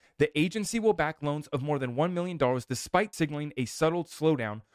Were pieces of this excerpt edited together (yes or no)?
yes